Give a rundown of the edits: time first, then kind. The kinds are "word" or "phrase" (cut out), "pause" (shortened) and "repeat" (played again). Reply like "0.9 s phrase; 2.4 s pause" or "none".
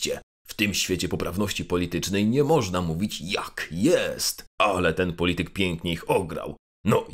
4.5 s pause